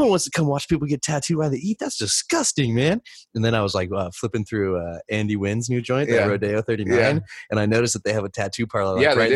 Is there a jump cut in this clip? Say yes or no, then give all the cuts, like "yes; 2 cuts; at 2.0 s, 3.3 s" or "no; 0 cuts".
no; 0 cuts